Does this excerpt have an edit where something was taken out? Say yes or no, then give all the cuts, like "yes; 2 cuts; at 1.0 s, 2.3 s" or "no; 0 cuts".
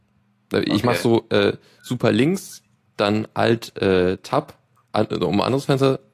no; 0 cuts